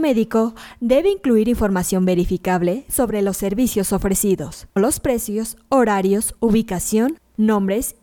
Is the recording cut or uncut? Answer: cut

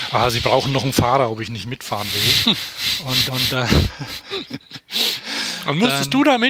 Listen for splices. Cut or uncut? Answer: cut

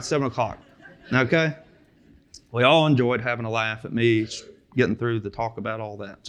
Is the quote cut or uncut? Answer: uncut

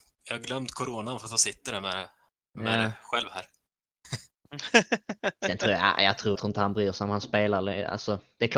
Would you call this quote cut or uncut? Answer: cut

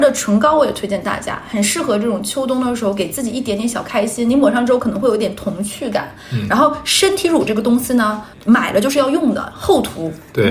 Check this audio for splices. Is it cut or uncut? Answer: cut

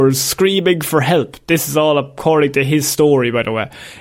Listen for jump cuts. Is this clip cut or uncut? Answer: uncut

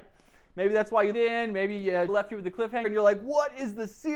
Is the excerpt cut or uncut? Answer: cut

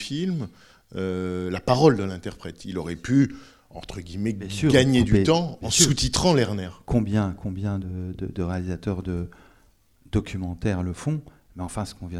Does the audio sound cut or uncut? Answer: uncut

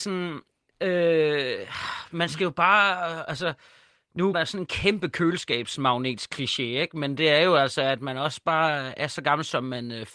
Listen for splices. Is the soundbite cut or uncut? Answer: cut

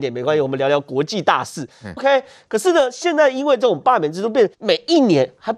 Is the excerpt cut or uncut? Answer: cut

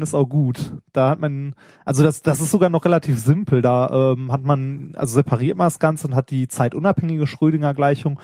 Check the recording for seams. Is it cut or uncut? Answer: uncut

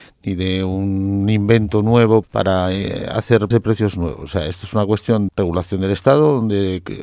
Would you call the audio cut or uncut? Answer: cut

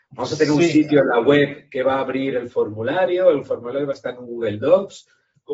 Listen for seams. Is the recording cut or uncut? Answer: uncut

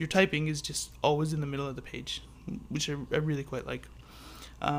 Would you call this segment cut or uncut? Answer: uncut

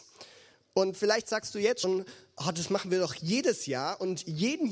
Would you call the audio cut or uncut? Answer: uncut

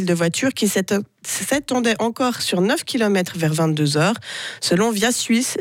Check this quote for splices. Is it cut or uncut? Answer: uncut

